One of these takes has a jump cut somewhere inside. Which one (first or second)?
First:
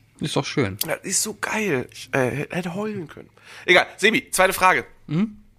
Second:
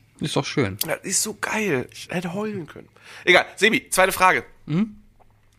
second